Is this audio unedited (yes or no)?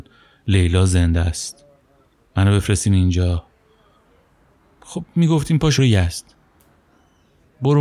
no